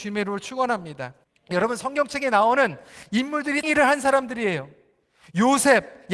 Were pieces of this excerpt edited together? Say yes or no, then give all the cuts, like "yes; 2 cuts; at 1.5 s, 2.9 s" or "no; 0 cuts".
yes; 2 cuts; at 1.2 s, 3.6 s